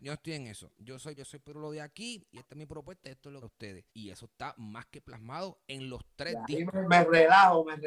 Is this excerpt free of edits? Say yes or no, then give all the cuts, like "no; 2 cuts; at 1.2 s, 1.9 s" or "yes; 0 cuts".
no; 3 cuts; at 1.2 s, 3.4 s, 3.9 s